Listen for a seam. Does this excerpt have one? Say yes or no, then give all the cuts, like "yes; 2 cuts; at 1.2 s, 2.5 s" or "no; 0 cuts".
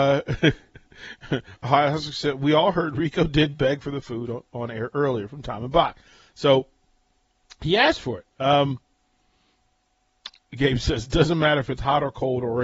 no; 0 cuts